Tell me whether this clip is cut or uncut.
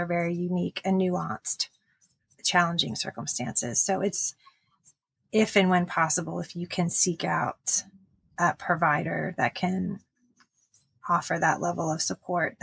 uncut